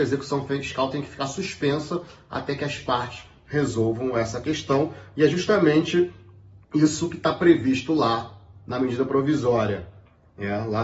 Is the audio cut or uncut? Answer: cut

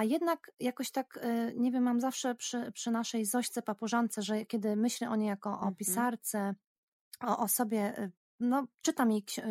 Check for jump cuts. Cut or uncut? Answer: uncut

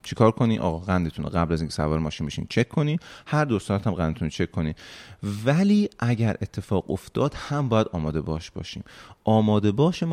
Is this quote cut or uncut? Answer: uncut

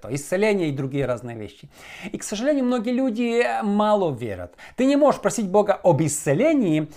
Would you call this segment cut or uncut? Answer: uncut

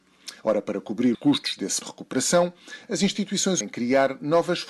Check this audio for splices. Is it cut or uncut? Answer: cut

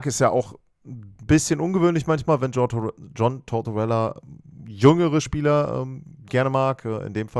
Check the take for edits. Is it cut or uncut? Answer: uncut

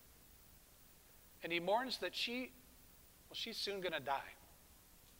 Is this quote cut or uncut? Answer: uncut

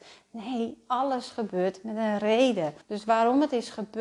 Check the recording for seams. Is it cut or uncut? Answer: cut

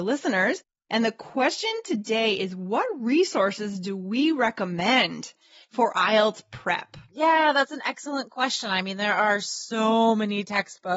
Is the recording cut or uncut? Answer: uncut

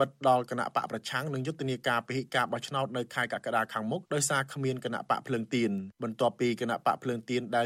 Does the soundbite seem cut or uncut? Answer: cut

